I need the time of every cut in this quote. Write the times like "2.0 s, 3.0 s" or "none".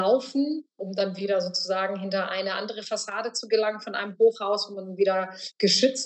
none